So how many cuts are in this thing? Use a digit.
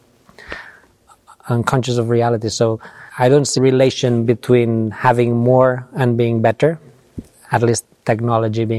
3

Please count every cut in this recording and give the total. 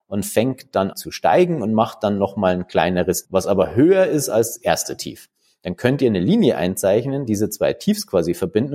3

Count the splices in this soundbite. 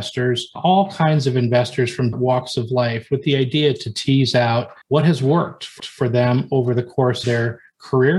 4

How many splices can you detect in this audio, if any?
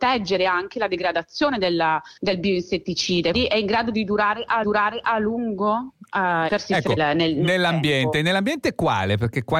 5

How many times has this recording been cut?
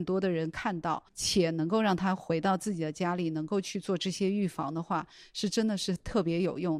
1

